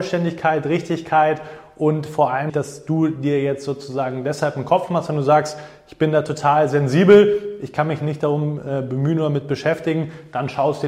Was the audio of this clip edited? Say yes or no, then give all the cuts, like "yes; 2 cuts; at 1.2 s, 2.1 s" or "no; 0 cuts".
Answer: yes; 1 cut; at 2.5 s